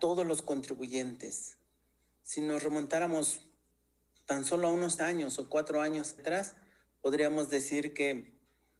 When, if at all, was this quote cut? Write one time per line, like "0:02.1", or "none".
0:01.8
0:05.0
0:06.2